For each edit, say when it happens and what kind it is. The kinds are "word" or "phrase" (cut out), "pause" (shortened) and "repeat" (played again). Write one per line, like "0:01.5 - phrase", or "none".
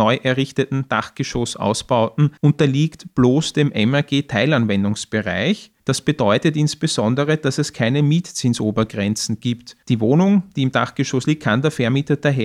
0:02.4 - pause
0:05.8 - pause
0:09.8 - pause